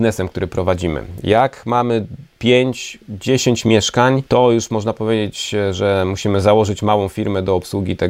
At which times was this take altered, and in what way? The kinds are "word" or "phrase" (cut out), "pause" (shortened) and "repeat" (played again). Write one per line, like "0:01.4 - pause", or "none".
0:04.3 - pause